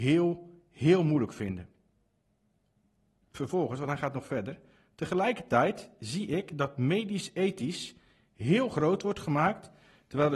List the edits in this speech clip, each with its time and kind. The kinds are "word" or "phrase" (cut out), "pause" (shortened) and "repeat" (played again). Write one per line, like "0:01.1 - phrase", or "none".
none

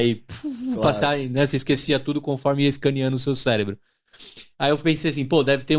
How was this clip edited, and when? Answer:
none

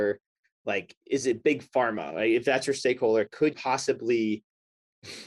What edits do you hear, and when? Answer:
0:01.0 - pause
0:03.5 - word

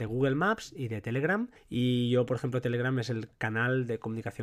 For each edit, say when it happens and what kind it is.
0:01.6 - pause

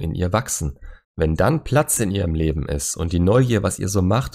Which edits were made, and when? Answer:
0:01.0 - pause

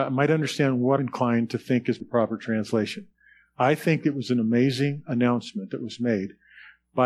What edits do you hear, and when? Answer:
0:01.0 - word
0:02.0 - word

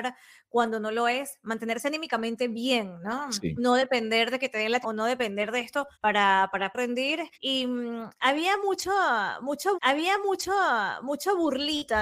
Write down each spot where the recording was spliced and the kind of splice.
0:04.8 - word
0:05.9 - pause
0:06.7 - word
0:07.3 - pause
0:09.7 - repeat

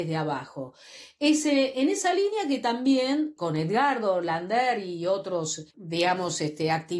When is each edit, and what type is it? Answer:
0:05.7 - pause

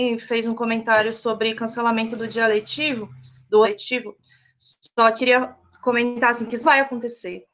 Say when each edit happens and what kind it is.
0:03.6 - word
0:06.6 - word

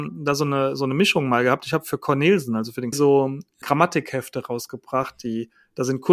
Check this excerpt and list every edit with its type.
0:02.9 - phrase

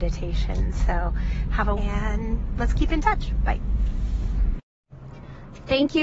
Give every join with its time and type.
0:01.8 - phrase

